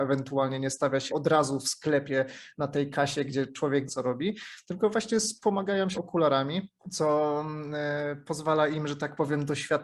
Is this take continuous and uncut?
no; 4 cuts; at 1.1 s, 3.9 s, 5.9 s, 6.8 s

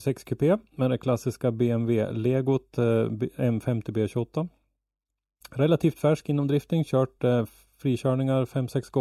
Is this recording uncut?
yes; 0 cuts

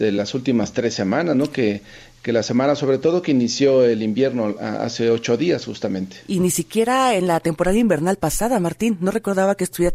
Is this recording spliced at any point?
no; 0 cuts

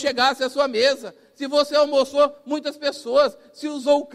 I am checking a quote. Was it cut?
no; 0 cuts

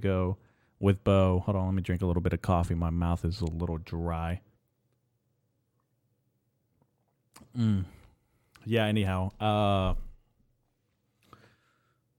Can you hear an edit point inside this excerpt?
no; 0 cuts

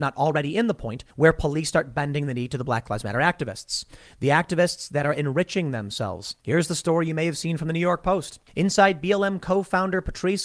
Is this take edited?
yes; 3 cuts; at 1.1 s, 6.4 s, 8.5 s

